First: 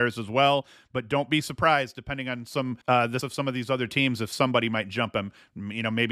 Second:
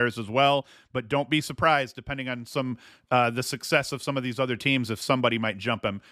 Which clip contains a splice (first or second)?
first